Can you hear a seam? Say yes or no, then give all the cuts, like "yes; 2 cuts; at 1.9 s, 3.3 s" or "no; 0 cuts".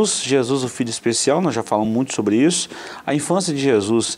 no; 0 cuts